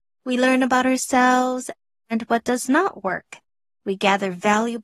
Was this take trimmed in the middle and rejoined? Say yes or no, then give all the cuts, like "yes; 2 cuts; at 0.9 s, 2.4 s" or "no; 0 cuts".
no; 0 cuts